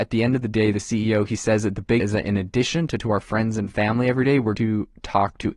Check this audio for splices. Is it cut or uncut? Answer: cut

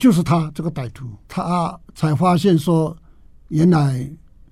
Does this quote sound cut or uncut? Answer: cut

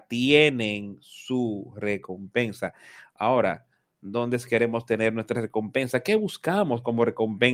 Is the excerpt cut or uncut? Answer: uncut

